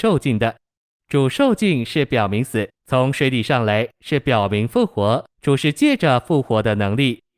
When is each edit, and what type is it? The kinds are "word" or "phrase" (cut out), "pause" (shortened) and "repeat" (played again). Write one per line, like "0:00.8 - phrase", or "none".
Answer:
0:02.8 - pause
0:05.3 - pause